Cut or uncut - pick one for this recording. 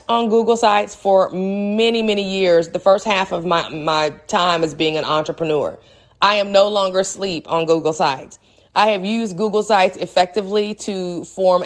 uncut